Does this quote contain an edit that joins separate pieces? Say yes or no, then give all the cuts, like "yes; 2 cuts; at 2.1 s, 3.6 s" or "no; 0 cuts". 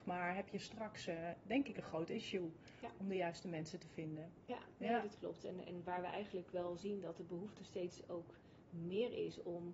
no; 0 cuts